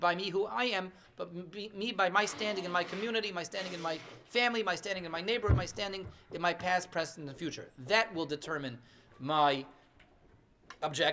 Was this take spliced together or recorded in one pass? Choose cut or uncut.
uncut